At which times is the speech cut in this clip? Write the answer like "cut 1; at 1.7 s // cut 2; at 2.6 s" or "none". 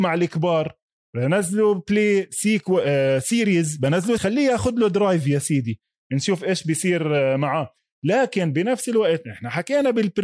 cut 1; at 4.2 s